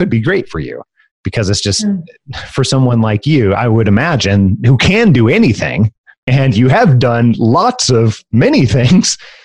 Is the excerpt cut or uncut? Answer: uncut